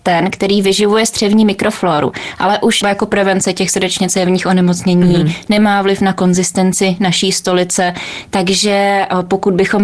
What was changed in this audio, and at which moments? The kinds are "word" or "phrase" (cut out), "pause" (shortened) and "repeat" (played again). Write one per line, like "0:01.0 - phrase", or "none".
0:02.8 - phrase